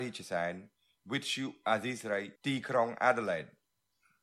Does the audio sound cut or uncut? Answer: cut